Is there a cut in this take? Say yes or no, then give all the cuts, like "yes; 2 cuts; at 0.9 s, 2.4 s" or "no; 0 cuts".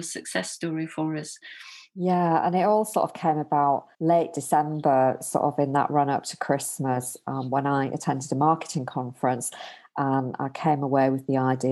yes; 1 cut; at 3.9 s